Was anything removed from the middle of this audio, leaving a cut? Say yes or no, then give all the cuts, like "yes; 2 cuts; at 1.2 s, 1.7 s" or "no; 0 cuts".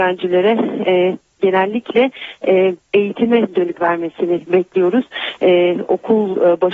yes; 2 cuts; at 2.8 s, 3.8 s